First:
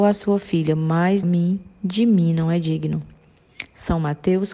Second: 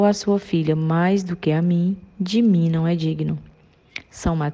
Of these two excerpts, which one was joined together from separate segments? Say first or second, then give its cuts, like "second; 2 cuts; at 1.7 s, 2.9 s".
first; 1 cut; at 1.2 s